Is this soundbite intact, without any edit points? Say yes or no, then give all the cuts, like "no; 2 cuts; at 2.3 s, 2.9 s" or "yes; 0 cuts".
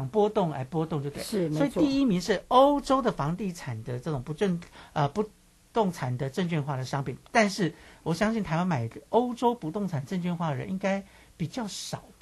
yes; 0 cuts